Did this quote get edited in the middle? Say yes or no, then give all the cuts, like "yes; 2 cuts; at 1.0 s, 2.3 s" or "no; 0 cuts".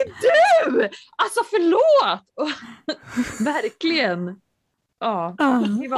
no; 0 cuts